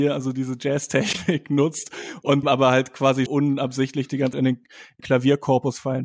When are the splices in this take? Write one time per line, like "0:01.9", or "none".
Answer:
0:02.4
0:03.3
0:04.3
0:05.0